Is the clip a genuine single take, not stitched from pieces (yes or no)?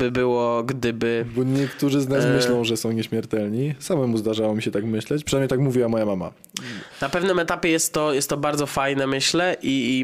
yes